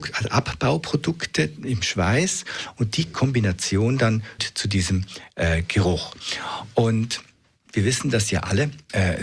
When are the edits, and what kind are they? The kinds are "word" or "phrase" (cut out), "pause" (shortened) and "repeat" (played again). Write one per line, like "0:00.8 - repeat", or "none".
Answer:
0:04.4 - word